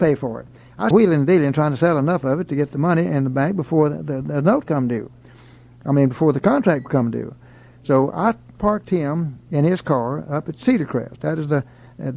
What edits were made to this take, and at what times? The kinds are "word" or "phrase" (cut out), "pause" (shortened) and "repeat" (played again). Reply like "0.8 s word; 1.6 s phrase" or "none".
0.9 s word